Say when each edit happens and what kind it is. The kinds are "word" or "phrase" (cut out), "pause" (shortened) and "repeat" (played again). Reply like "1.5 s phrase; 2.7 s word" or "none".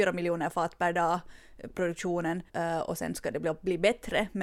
2.5 s pause